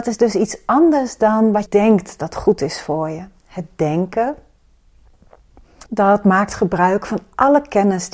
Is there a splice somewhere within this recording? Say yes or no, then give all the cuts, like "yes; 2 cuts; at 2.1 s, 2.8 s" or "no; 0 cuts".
yes; 2 cuts; at 1.7 s, 5.9 s